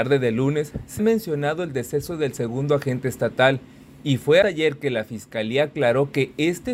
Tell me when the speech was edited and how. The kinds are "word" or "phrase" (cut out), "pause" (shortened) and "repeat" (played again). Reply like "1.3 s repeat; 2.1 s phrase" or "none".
1.0 s word; 4.4 s word